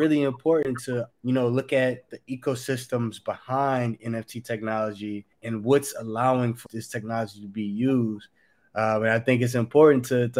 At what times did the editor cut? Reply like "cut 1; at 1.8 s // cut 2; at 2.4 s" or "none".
cut 1; at 1.1 s // cut 2; at 2.1 s // cut 3; at 5.3 s // cut 4; at 6.7 s